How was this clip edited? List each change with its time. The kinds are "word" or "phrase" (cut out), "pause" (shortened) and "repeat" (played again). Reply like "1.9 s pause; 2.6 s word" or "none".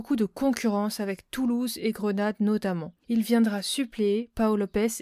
3.0 s pause